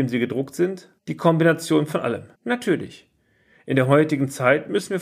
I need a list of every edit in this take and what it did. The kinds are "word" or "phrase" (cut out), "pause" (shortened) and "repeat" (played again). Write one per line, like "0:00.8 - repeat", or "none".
0:01.0 - pause
0:02.3 - pause